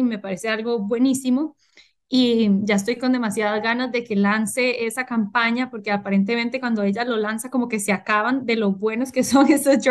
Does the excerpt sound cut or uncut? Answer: uncut